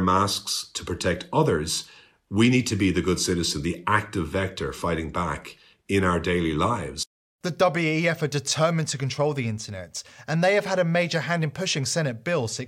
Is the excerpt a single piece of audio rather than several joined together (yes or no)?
yes